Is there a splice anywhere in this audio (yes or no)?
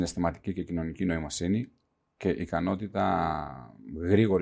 no